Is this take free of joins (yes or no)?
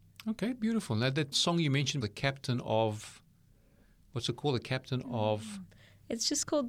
no